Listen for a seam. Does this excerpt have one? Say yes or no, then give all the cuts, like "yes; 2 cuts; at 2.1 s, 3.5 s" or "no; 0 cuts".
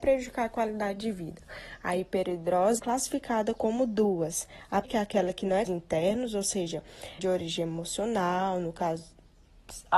yes; 4 cuts; at 2.8 s, 4.8 s, 5.7 s, 7.2 s